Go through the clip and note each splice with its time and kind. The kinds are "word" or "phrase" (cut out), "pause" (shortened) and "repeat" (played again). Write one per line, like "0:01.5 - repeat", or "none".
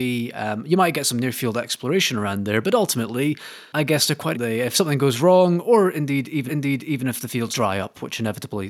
0:04.3 - phrase
0:06.5 - repeat
0:07.5 - word